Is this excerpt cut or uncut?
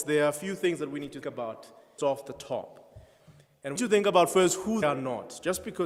cut